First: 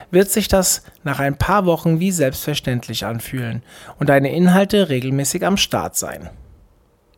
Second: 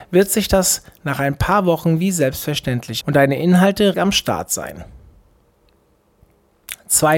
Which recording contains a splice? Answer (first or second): second